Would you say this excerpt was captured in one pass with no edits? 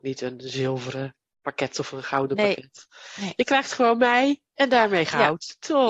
yes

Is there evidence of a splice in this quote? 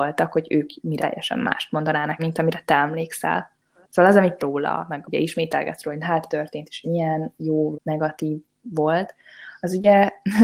yes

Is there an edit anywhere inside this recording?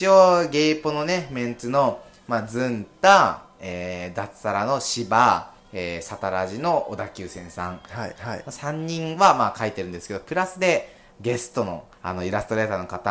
yes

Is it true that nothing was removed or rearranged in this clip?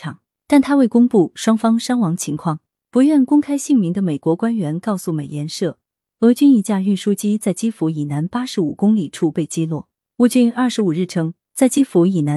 yes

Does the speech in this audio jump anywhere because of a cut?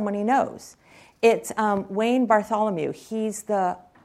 no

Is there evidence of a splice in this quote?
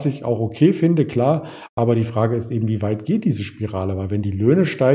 no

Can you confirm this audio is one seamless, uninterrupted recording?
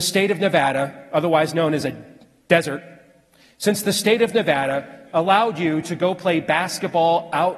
yes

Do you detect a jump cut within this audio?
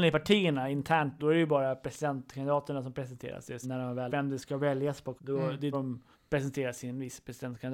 yes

